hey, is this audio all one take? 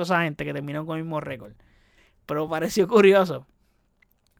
yes; 0 cuts

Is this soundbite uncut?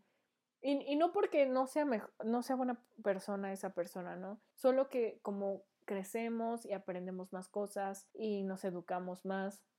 no; 2 cuts; at 4.5 s, 8.1 s

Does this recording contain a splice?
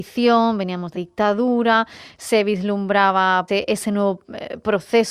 yes; 2 cuts; at 0.9 s, 3.5 s

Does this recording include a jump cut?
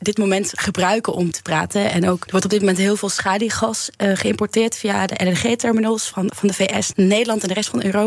yes; 4 cuts; at 1.3 s, 2.3 s, 6.3 s, 6.9 s

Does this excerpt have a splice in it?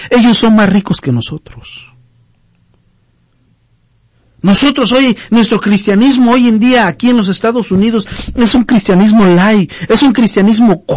no; 0 cuts

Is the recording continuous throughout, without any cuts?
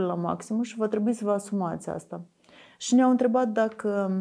yes; 0 cuts

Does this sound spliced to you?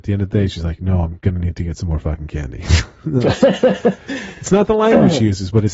no; 0 cuts

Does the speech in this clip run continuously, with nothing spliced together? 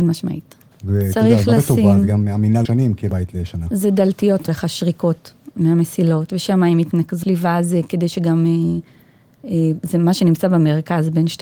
no; 4 cuts; at 2.6 s, 3.1 s, 4.5 s, 7.2 s

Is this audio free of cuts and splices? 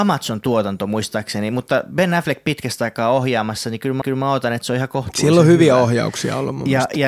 no; 1 cut; at 4.0 s

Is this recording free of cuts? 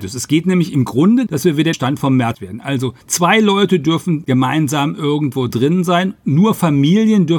no; 5 cuts; at 1.3 s, 1.7 s, 2.3 s, 3.0 s, 5.5 s

